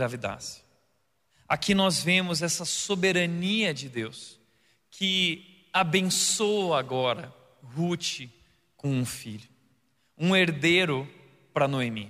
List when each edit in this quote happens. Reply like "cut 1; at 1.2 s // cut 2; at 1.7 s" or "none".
none